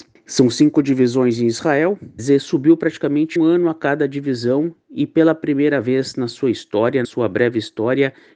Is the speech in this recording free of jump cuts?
no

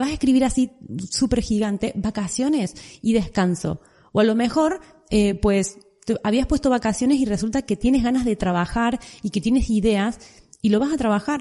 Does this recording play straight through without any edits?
yes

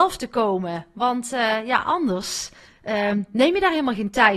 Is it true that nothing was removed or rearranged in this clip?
yes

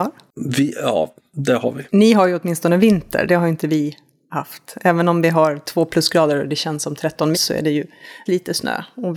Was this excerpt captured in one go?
no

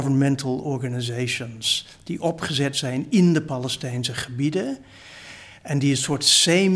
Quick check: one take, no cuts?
yes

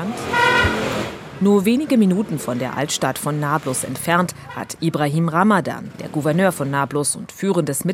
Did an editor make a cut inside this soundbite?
no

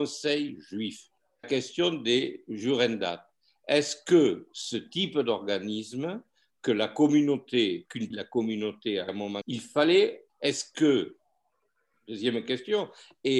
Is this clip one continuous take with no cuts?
no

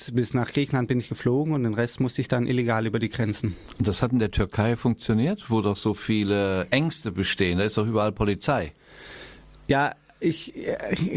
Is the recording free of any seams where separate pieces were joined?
yes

